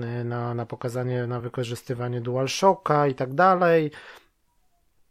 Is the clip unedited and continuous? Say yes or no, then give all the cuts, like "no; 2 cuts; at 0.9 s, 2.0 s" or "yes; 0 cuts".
yes; 0 cuts